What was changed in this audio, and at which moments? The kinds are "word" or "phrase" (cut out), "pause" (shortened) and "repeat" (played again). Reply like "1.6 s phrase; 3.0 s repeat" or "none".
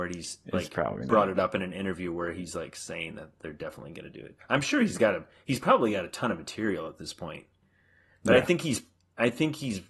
none